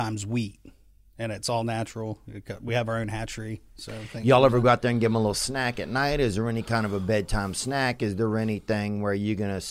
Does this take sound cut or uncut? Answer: uncut